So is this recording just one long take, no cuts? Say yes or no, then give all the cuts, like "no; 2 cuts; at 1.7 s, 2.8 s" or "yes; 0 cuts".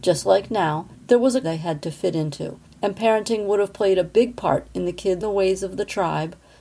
no; 4 cuts; at 0.9 s, 1.4 s, 2.7 s, 5.2 s